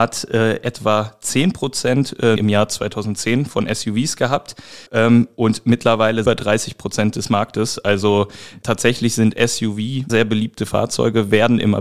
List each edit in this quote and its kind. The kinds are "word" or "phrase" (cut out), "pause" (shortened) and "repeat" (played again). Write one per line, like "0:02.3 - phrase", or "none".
0:02.4 - word
0:04.9 - pause
0:06.2 - phrase
0:10.1 - word